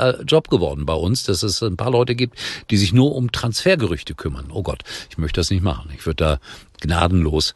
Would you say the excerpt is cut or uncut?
uncut